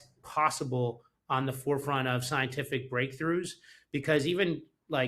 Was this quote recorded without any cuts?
yes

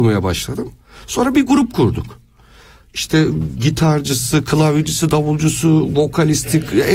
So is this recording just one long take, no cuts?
yes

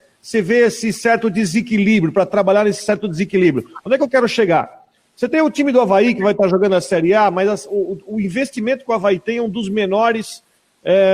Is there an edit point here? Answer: no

